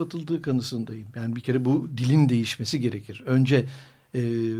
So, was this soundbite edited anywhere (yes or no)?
no